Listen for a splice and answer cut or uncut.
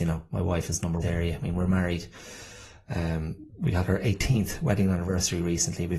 cut